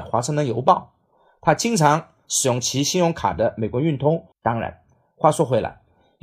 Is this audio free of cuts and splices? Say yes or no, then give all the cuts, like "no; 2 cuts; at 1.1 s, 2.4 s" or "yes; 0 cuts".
no; 1 cut; at 4.3 s